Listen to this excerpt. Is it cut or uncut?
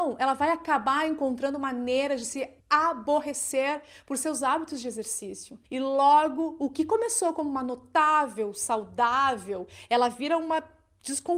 cut